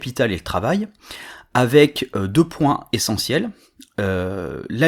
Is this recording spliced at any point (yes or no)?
no